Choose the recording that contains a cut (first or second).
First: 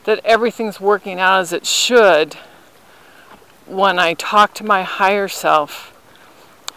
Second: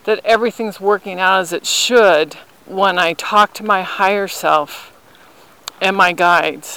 second